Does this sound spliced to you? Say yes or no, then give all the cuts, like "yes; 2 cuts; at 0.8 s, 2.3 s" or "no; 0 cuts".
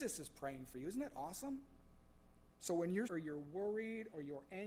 yes; 2 cuts; at 2.6 s, 3.1 s